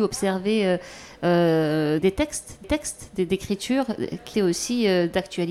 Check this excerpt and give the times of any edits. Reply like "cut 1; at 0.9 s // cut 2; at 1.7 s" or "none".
cut 1; at 2.0 s // cut 2; at 2.6 s // cut 3; at 4.3 s